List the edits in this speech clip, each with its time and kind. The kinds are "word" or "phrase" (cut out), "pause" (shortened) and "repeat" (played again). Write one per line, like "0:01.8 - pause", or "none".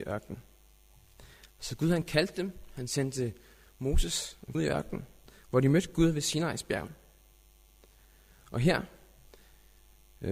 0:04.5 - phrase